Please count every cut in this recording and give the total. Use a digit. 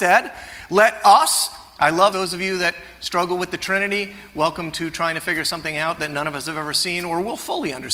1